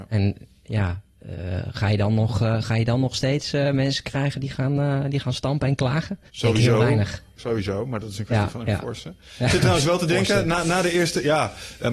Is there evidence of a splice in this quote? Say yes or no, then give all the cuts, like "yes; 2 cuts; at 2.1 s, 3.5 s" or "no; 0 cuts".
yes; 2 cuts; at 6.3 s, 7.3 s